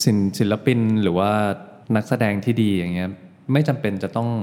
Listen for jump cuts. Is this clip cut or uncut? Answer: cut